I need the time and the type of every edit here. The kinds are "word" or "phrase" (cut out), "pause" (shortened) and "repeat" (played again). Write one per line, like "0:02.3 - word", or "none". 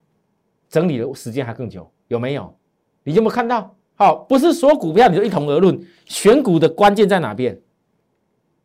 0:02.0 - pause
0:03.9 - pause